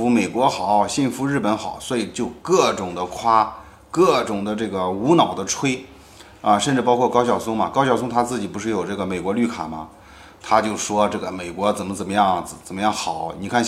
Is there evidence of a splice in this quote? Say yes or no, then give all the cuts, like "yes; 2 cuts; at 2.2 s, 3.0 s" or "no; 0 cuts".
no; 0 cuts